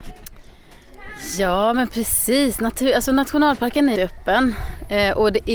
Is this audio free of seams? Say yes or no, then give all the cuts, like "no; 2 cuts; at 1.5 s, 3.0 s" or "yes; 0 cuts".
no; 1 cut; at 4.0 s